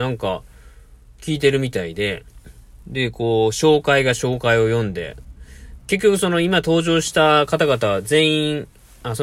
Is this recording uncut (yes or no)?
no